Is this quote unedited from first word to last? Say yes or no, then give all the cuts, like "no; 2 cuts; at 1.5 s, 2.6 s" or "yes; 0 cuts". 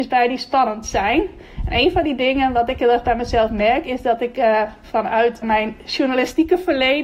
no; 1 cut; at 5.4 s